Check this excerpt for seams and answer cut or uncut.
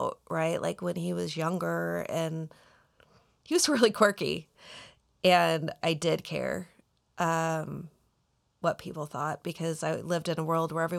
cut